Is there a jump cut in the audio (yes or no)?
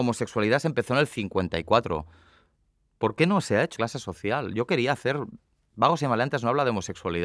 yes